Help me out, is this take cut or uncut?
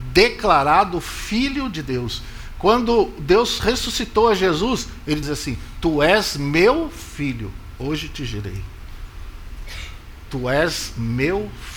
cut